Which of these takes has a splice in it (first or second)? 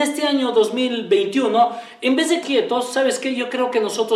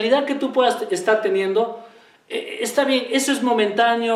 first